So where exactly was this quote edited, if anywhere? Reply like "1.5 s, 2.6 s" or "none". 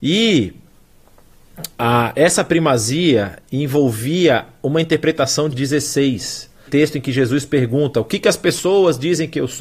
1.7 s, 5.5 s, 6.7 s